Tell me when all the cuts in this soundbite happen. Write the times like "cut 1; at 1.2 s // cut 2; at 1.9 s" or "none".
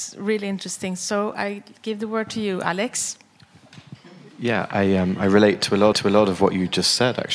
cut 1; at 5.9 s